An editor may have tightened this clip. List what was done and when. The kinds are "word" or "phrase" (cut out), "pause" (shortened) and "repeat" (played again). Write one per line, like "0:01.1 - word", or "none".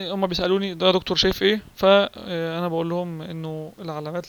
none